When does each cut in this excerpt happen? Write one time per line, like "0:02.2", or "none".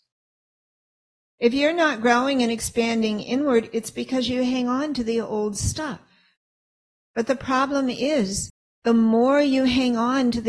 none